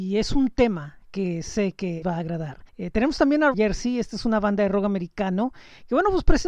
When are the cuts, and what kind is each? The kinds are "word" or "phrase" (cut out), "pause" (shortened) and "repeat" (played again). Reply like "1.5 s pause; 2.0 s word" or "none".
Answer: 2.0 s word; 2.7 s pause; 3.5 s phrase